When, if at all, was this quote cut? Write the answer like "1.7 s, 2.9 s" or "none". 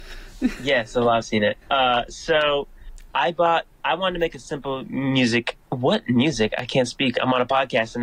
1.2 s, 1.6 s, 3.1 s, 3.7 s, 5.6 s